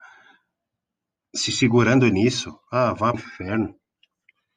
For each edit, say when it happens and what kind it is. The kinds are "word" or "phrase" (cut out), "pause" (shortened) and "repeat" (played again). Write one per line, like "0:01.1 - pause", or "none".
0:03.1 - word